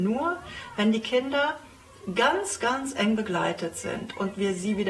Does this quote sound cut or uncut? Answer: uncut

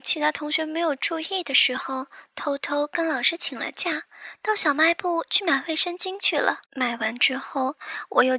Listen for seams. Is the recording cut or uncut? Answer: cut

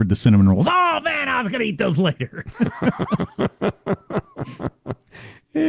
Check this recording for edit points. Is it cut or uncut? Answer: uncut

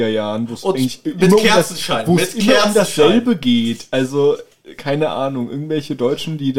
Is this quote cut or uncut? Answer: uncut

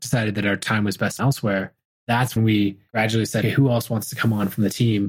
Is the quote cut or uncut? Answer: cut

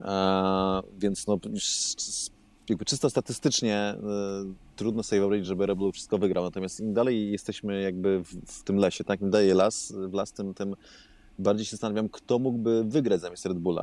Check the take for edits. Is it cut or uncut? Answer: uncut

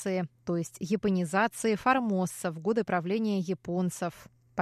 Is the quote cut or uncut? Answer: uncut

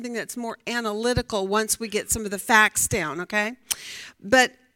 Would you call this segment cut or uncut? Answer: uncut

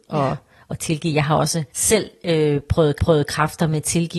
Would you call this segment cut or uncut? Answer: cut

